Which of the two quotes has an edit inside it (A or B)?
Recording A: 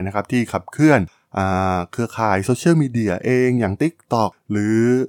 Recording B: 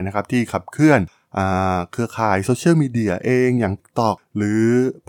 B